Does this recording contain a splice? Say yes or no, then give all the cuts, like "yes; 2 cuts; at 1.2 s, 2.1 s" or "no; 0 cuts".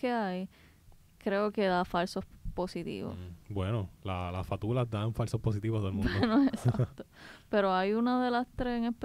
no; 0 cuts